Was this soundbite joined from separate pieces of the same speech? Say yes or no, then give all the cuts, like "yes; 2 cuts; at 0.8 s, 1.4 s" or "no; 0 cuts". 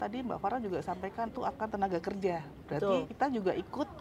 yes; 3 cuts; at 1.3 s, 1.7 s, 3.1 s